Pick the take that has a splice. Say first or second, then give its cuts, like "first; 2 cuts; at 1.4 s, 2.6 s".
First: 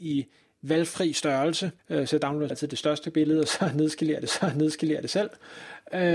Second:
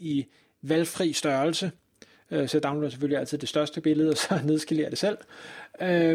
first; 3 cuts; at 1.8 s, 2.5 s, 4.3 s